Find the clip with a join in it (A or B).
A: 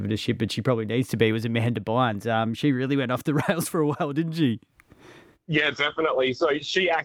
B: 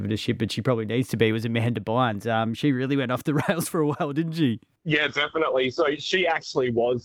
B